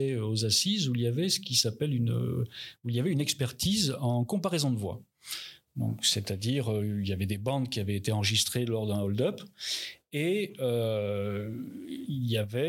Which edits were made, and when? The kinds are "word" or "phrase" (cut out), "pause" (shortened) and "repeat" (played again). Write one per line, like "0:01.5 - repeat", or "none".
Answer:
none